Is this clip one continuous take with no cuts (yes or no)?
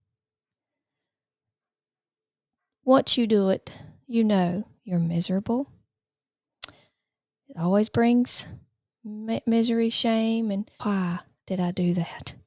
no